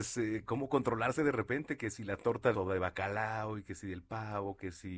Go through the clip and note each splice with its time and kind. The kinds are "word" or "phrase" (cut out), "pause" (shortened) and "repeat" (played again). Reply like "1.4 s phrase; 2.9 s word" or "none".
2.5 s phrase